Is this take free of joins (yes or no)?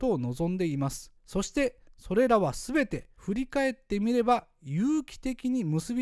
no